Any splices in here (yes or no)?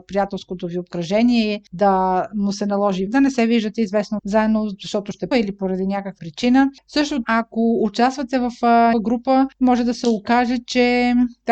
yes